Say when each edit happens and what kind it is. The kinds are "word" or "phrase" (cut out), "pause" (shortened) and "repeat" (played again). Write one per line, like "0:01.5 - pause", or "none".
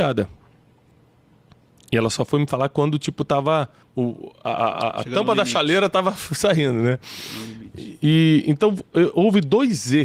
0:03.8 - pause